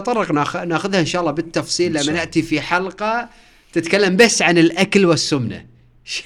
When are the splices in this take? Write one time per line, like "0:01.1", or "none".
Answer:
none

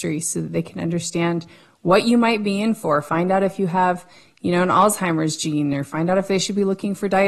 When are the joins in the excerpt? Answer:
none

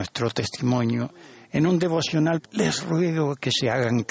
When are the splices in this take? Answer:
0:02.4

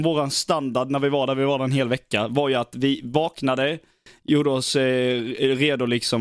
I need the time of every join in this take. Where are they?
none

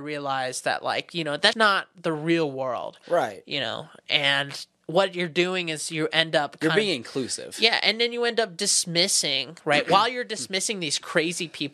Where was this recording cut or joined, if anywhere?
0:01.5

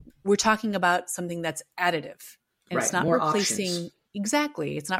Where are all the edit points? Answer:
none

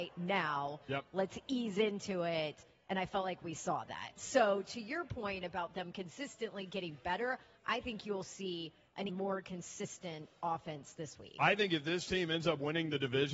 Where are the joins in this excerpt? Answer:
0:09.1

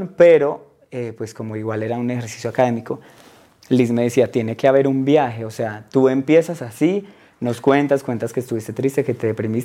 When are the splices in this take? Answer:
none

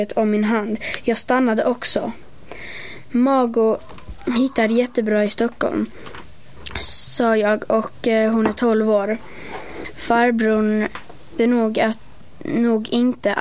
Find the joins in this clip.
0:11.4

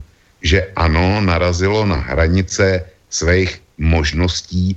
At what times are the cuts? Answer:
none

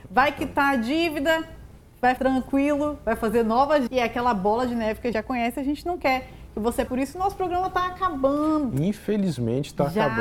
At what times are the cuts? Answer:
0:02.2
0:03.9
0:05.1
0:06.9

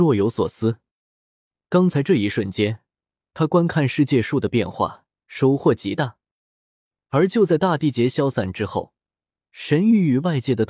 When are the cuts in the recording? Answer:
none

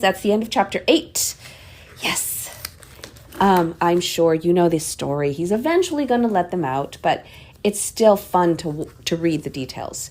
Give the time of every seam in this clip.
none

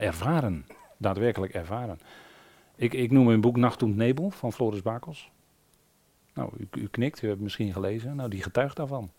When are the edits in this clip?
none

